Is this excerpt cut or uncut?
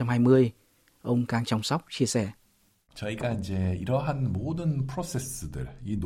uncut